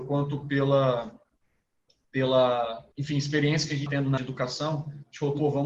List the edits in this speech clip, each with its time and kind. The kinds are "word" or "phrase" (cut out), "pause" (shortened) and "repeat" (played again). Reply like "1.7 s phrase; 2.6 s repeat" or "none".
2.9 s pause; 3.9 s word; 4.2 s word